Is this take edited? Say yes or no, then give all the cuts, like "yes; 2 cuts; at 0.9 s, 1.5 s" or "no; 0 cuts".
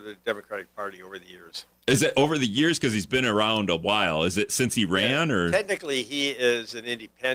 no; 0 cuts